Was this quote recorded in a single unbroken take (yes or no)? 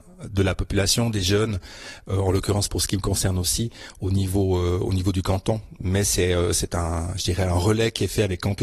yes